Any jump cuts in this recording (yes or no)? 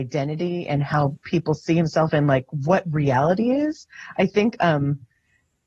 no